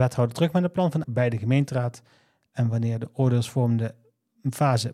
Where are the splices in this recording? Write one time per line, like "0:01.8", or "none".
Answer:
0:01.0

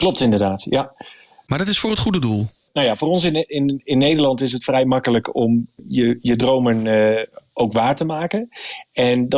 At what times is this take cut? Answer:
none

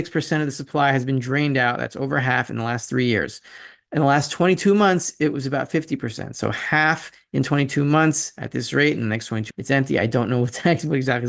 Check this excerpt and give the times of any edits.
0:09.5

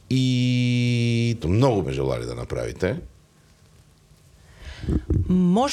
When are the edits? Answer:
0:01.4
0:01.8

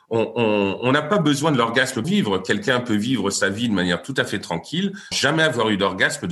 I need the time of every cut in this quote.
0:02.0
0:05.1

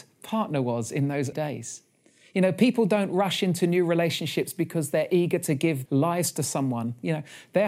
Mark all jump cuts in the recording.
0:01.3
0:05.9

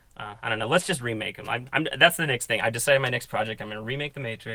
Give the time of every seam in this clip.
none

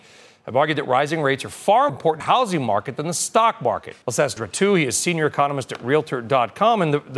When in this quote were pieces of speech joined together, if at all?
0:01.9
0:02.2
0:04.0
0:04.4

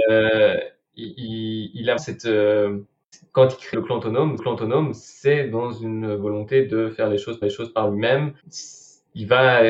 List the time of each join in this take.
0:02.0
0:03.1
0:03.7
0:04.4
0:07.4
0:08.4

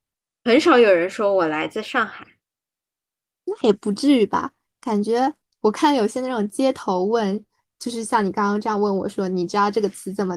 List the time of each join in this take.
none

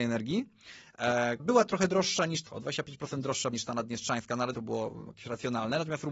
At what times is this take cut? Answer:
0:01.4
0:02.5
0:03.5
0:04.5

